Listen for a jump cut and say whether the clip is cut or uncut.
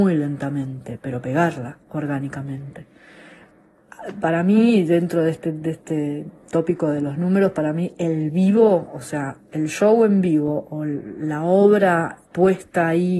cut